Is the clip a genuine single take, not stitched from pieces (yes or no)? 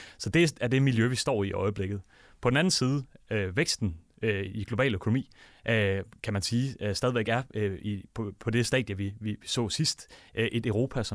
yes